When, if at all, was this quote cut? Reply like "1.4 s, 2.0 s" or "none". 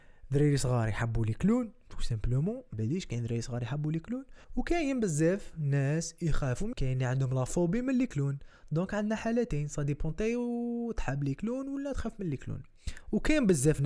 2.7 s, 4.4 s, 6.7 s

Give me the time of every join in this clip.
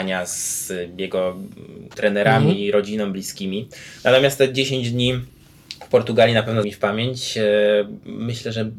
1.9 s, 6.6 s

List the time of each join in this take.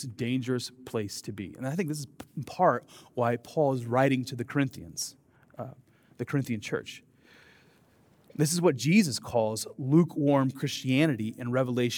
none

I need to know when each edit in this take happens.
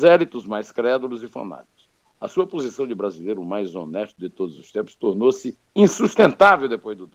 2.0 s, 5.7 s

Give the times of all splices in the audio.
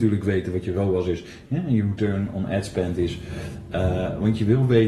none

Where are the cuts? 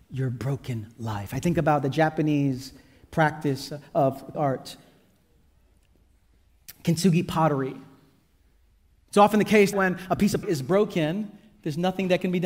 4.3 s, 9.7 s, 10.4 s

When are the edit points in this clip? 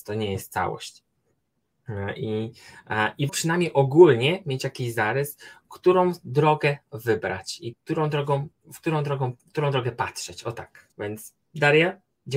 3.3 s, 7.7 s, 8.5 s, 9.4 s, 10.9 s

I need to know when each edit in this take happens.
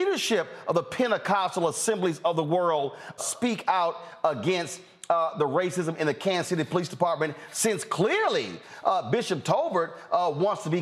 3.2 s

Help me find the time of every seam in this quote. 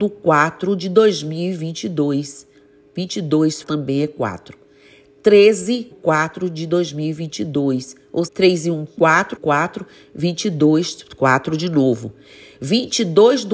3.6 s, 5.9 s, 8.3 s, 9.4 s

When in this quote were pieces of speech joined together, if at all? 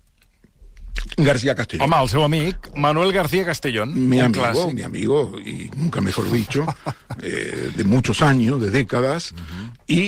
none

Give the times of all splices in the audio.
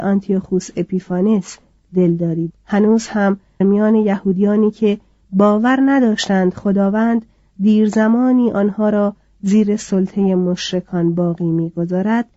2.5 s, 3.6 s

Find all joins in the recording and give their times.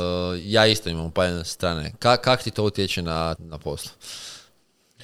3.4 s

